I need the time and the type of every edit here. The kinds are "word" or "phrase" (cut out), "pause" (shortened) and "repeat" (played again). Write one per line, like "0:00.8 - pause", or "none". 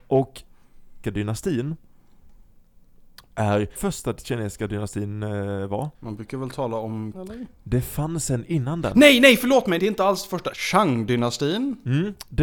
0:01.0 - phrase
0:03.8 - phrase
0:05.9 - pause
0:07.1 - word
0:09.8 - word